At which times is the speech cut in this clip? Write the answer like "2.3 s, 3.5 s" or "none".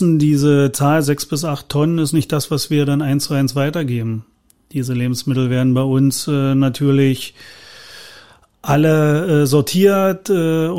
none

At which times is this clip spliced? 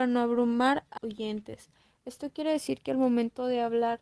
1.0 s

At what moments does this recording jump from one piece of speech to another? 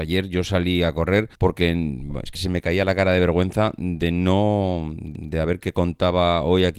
1.3 s, 2.3 s, 5.1 s

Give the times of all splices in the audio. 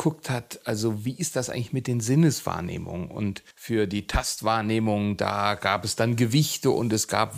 3.5 s

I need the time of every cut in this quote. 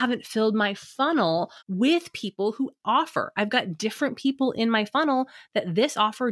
1.6 s, 2.8 s

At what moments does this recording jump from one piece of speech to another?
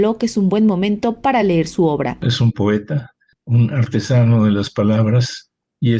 none

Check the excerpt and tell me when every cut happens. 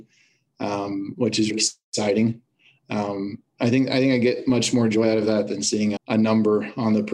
1.5 s, 6.0 s

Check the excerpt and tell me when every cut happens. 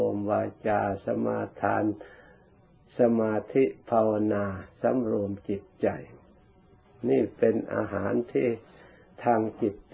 none

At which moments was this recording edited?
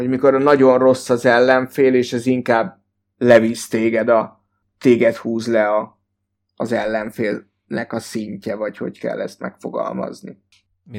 none

